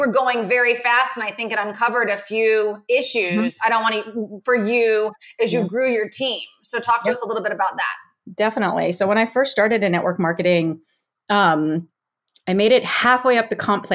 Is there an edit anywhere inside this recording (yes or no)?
no